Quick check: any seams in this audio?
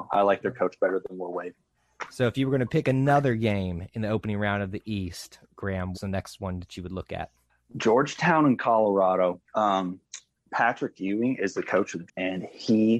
yes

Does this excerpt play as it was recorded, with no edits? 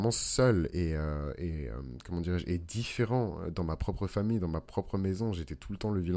yes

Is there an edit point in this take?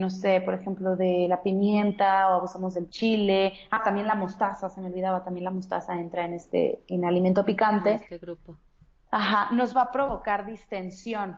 no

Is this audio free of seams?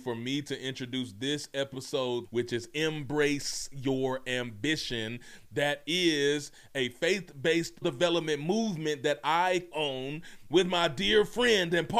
no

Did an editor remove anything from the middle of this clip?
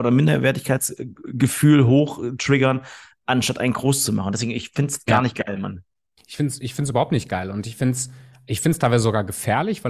no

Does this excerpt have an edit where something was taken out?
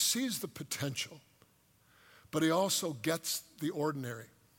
no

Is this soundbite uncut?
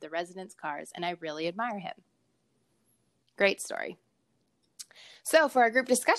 yes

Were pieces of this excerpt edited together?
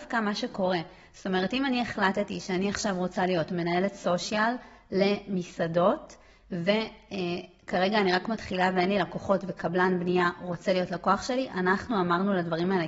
no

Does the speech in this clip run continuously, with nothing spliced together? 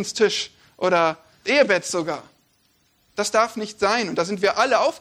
no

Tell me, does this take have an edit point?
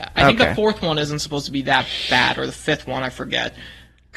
no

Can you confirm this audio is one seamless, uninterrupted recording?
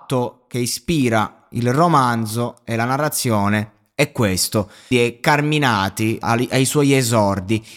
no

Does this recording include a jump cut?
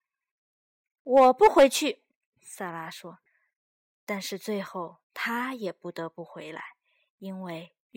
yes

